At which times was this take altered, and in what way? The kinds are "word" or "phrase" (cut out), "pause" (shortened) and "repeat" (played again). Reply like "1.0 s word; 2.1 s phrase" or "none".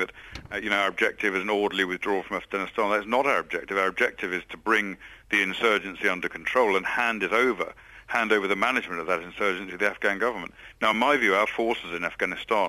none